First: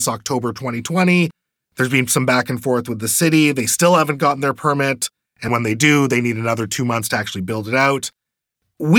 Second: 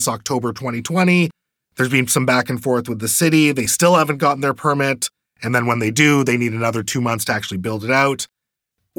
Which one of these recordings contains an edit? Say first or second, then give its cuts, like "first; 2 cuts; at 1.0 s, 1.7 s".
first; 1 cut; at 5.5 s